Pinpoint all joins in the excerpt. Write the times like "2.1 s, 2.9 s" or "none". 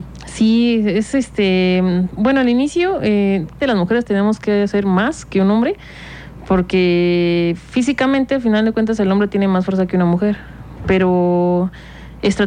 3.6 s